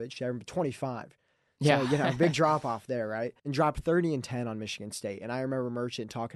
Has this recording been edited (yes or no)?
yes